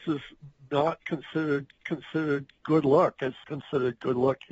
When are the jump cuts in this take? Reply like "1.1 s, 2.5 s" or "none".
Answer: 1.8 s, 3.4 s